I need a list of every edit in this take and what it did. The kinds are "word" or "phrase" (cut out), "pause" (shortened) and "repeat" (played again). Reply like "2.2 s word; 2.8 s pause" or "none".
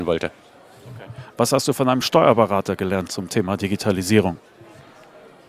none